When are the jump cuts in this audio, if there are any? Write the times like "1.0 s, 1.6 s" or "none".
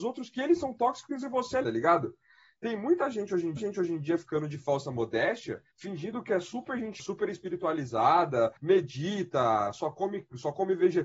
1.6 s, 3.6 s, 5.7 s, 7.0 s, 8.6 s